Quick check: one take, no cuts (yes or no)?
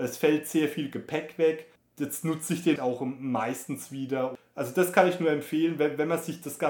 no